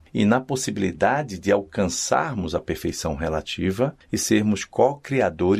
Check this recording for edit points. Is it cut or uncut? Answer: uncut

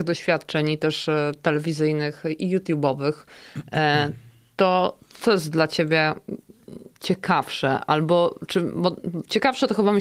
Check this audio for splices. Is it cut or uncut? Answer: uncut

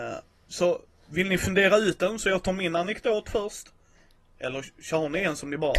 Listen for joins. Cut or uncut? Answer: uncut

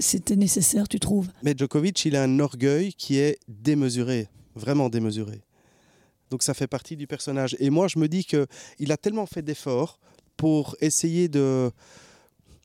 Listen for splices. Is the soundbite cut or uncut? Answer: uncut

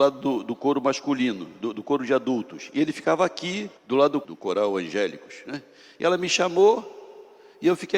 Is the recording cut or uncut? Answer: cut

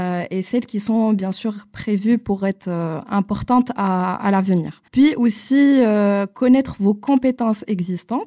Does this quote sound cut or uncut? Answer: cut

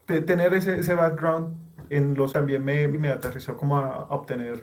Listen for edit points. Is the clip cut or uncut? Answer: cut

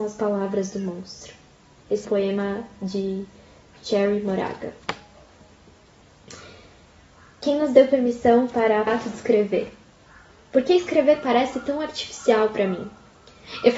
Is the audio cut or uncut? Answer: cut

